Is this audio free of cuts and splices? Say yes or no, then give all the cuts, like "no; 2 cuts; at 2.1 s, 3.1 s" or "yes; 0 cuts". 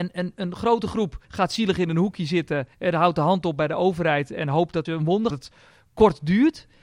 no; 4 cuts; at 1.2 s, 2.7 s, 4.9 s, 5.3 s